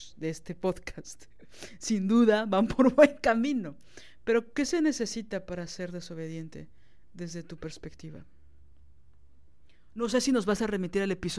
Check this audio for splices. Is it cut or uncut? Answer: uncut